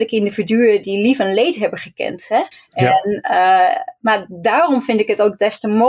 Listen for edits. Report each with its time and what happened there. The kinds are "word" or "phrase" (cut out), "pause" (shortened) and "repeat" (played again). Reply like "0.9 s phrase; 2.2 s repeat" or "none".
2.5 s pause